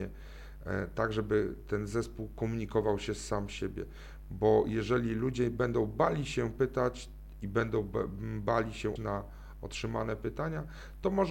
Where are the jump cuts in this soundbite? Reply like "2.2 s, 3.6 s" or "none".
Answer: 9.0 s